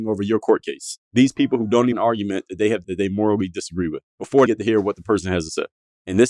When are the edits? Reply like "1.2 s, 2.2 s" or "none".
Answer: 1.9 s, 2.8 s, 4.5 s